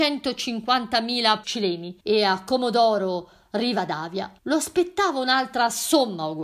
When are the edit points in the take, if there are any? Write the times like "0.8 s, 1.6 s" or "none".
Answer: 1.4 s, 2.0 s, 4.4 s